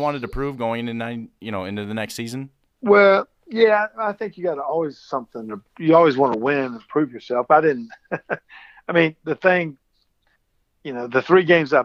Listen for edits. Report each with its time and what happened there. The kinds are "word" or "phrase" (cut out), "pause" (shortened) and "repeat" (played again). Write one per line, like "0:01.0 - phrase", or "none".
none